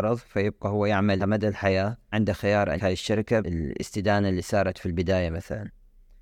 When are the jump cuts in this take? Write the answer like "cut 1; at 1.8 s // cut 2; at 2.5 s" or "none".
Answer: cut 1; at 1.2 s // cut 2; at 2.1 s // cut 3; at 2.8 s // cut 4; at 3.4 s